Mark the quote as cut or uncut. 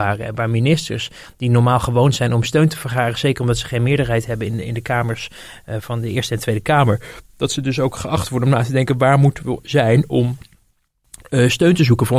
cut